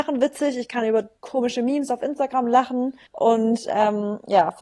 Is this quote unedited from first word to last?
no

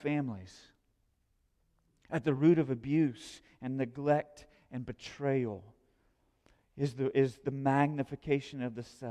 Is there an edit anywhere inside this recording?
no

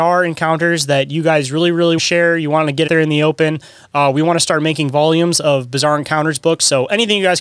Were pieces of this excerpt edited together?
yes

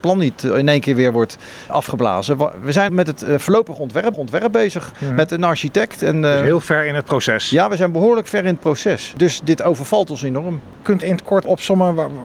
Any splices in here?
yes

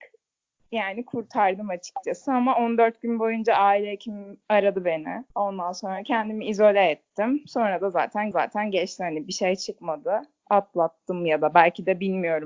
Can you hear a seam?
yes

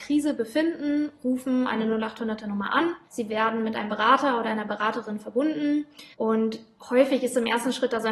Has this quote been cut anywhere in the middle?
yes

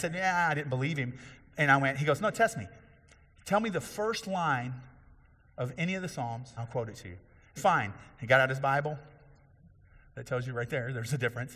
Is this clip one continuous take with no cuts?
no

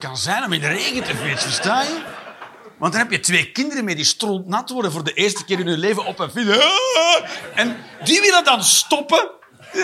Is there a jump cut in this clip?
no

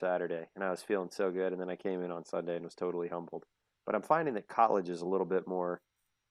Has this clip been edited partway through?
no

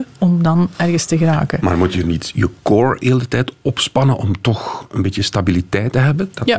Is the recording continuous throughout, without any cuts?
yes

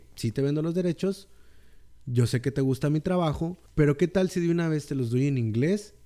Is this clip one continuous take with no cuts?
no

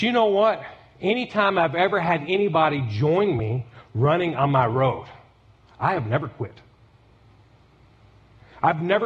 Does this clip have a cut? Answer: no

